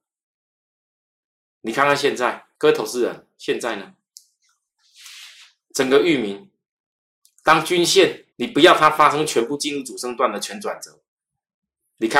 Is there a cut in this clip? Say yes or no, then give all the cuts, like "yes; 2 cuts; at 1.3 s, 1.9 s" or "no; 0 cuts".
yes; 2 cuts; at 2.5 s, 8.3 s